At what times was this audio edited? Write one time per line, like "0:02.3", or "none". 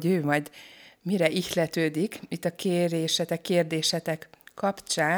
none